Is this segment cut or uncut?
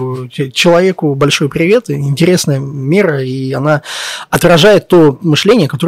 uncut